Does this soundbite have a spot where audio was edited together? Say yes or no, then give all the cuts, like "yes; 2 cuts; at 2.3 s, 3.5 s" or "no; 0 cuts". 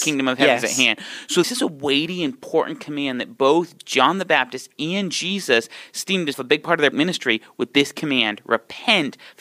yes; 3 cuts; at 1.4 s, 6.3 s, 6.9 s